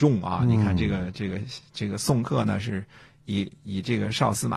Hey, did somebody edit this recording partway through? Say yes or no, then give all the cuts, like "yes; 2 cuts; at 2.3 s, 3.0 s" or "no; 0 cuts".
no; 0 cuts